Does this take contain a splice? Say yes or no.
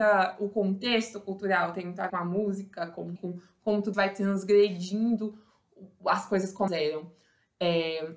yes